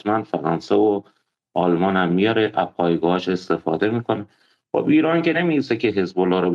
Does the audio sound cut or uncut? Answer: uncut